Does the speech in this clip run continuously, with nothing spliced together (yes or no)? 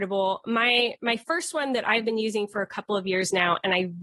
yes